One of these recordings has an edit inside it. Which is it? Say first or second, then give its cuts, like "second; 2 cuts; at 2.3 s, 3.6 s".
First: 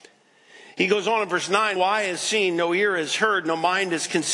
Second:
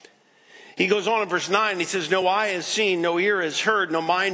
first; 1 cut; at 1.8 s